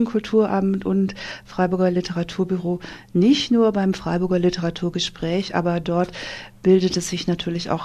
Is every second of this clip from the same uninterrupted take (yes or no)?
yes